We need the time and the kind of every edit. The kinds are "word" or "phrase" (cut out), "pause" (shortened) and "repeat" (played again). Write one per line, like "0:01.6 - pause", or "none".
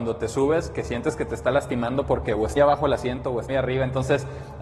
0:02.6 - word
0:03.5 - word